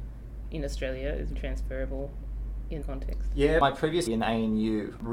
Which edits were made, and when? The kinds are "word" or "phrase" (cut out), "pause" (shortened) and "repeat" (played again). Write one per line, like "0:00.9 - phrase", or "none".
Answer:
0:01.3 - word
0:02.8 - word
0:04.1 - word